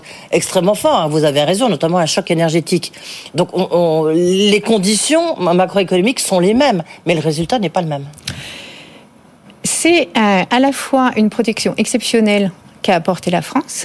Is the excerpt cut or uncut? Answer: uncut